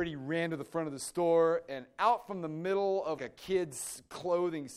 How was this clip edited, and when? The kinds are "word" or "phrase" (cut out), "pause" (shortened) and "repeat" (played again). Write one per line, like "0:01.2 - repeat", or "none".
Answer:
0:03.2 - word